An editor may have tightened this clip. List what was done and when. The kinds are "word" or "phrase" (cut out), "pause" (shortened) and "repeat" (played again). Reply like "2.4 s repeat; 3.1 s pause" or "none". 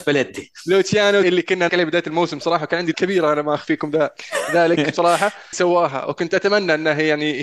1.2 s word; 1.7 s word; 2.9 s word; 5.5 s word

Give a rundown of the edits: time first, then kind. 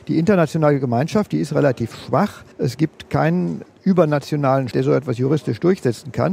2.5 s pause; 4.7 s word

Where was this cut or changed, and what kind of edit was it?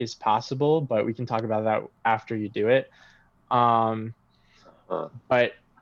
none

